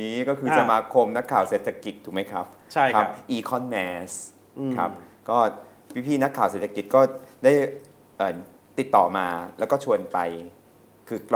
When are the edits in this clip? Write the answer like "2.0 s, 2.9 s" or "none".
none